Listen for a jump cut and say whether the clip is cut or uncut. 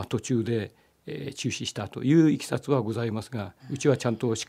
cut